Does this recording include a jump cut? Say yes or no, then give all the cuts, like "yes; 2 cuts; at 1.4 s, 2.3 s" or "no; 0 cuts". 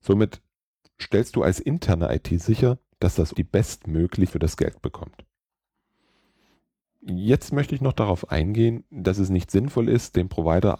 yes; 2 cuts; at 3.3 s, 4.3 s